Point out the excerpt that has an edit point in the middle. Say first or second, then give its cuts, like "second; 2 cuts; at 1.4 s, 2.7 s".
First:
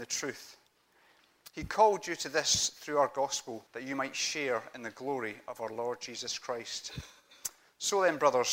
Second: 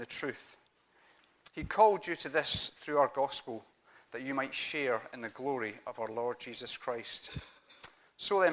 first; 1 cut; at 3.7 s